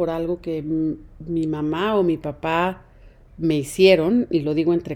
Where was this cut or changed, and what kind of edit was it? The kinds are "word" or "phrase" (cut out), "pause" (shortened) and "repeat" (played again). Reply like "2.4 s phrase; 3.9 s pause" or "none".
none